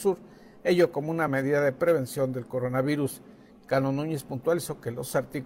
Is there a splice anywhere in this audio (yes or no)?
no